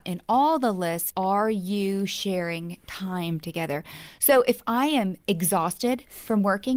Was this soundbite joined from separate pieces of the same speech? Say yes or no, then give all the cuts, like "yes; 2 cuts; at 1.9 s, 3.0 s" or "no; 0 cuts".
yes; 1 cut; at 1.1 s